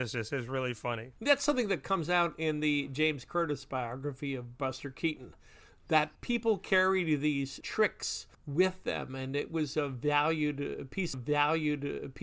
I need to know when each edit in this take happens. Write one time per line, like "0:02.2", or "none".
0:01.2
0:06.1
0:07.6
0:11.1